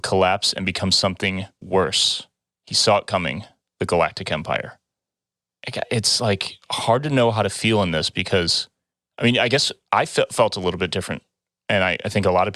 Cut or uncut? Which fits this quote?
uncut